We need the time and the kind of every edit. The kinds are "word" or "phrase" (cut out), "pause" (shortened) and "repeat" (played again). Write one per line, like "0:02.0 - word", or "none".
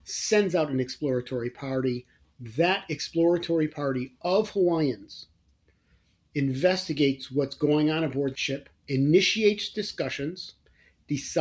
0:08.8 - pause

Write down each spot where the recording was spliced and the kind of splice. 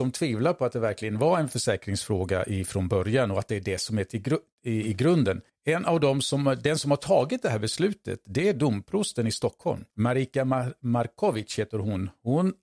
0:05.5 - pause
0:09.9 - pause

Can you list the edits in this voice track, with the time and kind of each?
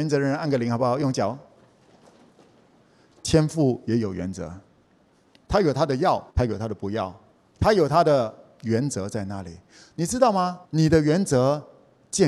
0:06.3 - pause
0:10.6 - pause

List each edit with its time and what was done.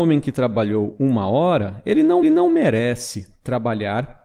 0:02.2 - repeat

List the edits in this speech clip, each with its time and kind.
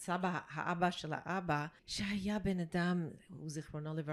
0:01.8 - pause

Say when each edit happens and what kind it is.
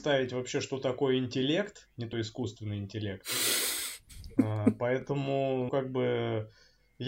0:02.1 - word
0:05.7 - word

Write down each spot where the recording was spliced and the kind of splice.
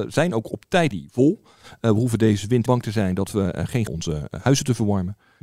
0:00.9 - word
0:02.7 - word
0:03.9 - phrase

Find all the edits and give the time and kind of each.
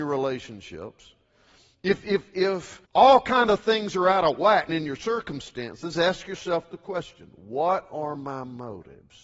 0:02.9 - pause
0:04.7 - word

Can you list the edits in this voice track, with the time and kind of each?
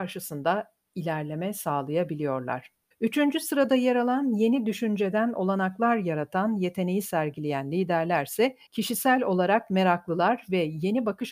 0:02.9 - pause
0:08.7 - pause

